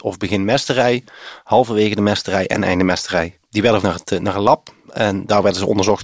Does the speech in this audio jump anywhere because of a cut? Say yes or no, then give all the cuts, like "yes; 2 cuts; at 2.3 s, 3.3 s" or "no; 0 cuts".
yes; 1 cut; at 3.8 s